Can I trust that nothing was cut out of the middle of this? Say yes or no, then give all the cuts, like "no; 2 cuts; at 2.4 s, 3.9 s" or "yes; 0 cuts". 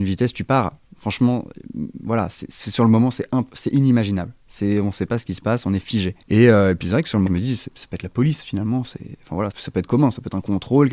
no; 3 cuts; at 6.2 s, 7.3 s, 9.5 s